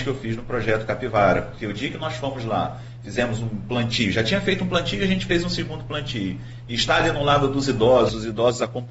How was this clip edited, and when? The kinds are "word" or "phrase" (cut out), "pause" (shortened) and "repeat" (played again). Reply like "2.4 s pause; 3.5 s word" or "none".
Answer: none